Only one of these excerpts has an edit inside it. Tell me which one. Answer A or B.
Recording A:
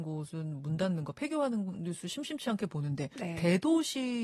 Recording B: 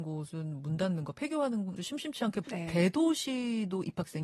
B